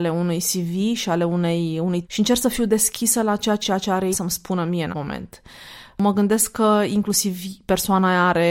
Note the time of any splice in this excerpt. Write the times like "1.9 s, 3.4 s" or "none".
2.0 s, 3.6 s, 4.1 s, 4.9 s